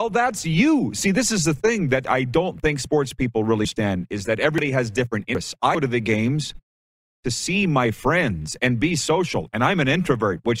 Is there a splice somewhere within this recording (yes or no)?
no